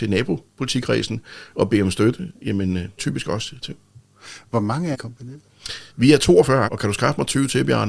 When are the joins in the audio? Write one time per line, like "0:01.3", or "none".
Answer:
0:03.0
0:03.6
0:04.9
0:05.9
0:06.7